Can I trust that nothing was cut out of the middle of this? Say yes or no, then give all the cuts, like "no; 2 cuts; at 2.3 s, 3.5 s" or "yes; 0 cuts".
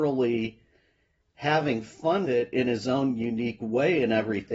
no; 1 cut; at 2.2 s